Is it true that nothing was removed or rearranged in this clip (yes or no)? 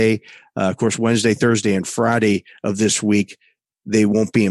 yes